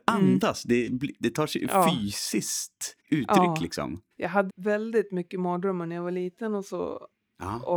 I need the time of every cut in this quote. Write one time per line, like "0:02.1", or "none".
0:03.0
0:04.1
0:04.5